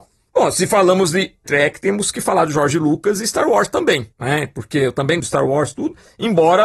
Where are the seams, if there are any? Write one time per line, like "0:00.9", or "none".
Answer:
0:01.5
0:04.1
0:05.2